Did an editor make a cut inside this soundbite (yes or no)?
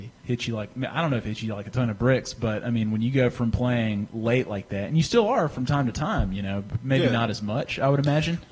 no